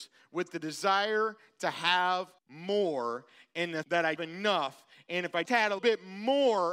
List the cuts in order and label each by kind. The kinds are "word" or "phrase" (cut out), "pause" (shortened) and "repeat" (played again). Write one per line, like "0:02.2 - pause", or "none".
0:02.4 - pause
0:03.8 - word
0:04.2 - phrase
0:05.5 - word
0:05.8 - word